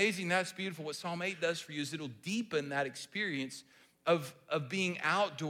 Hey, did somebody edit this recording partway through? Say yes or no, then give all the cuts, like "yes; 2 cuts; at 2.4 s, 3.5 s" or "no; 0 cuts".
no; 0 cuts